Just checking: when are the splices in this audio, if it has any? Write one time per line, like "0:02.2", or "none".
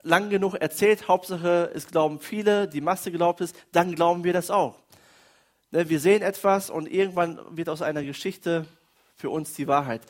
none